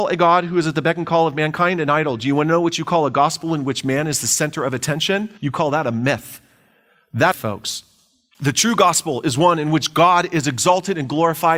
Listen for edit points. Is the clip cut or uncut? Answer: cut